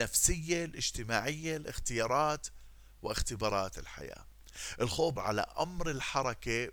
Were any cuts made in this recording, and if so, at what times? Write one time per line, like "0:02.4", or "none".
0:03.7
0:05.2